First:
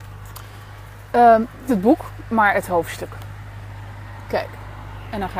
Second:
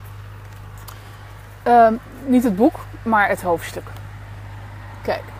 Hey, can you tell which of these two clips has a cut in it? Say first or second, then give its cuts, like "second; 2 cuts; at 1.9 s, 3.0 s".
first; 1 cut; at 1.7 s